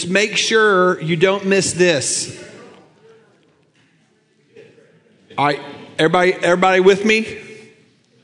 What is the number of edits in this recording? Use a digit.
0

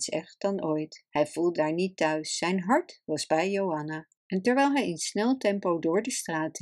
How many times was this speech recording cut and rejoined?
3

